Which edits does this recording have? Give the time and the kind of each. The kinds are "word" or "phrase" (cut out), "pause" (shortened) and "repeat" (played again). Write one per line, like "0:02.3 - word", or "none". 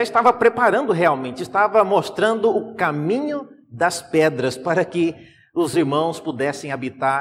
0:05.7 - word